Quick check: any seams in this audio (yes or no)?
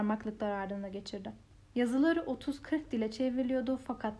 no